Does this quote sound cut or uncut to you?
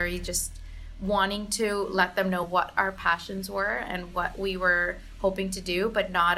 uncut